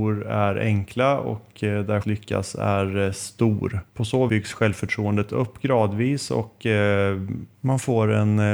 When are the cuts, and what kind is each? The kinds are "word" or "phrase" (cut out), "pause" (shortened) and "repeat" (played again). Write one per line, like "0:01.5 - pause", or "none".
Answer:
0:02.0 - phrase
0:03.9 - pause
0:04.3 - word

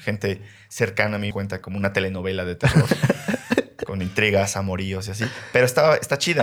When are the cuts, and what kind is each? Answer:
0:01.3 - phrase
0:01.6 - phrase

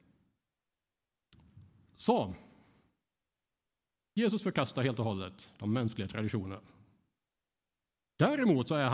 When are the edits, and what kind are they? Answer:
none

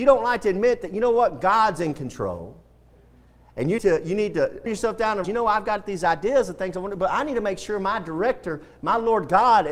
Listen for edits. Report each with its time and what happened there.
0:03.8 - word
0:04.7 - word
0:05.2 - word

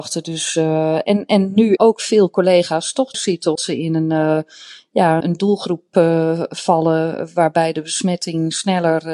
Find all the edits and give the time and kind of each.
0:01.8 - word
0:03.1 - word
0:03.6 - word
0:05.2 - word

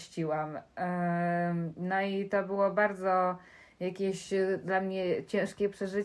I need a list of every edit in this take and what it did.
none

